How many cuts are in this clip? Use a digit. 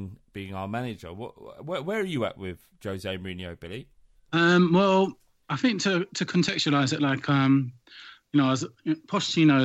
1